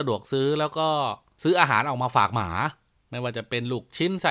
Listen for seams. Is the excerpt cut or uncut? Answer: uncut